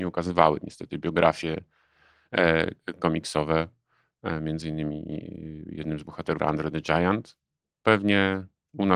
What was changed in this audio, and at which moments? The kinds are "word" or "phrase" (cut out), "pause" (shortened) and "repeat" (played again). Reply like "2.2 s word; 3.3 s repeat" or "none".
6.4 s phrase

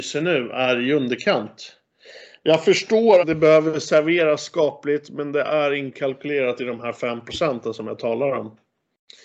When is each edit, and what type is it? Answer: 3.2 s word

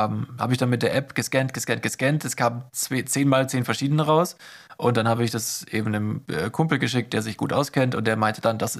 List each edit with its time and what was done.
none

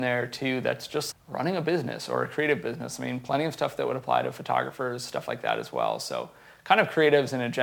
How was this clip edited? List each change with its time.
1.1 s word

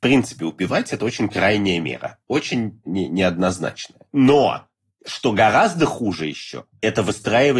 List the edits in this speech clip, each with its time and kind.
none

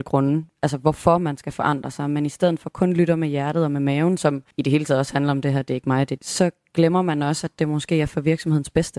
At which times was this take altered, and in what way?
4.5 s pause; 6.2 s phrase

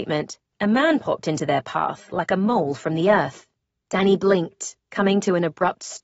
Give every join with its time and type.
none

